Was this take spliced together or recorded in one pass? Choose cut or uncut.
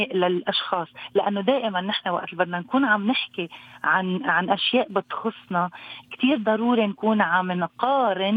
uncut